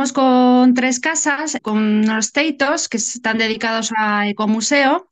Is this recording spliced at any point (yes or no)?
yes